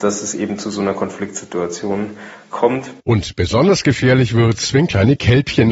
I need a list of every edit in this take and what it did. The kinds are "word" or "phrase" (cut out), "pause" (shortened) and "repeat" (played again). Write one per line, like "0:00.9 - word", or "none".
0:03.0 - pause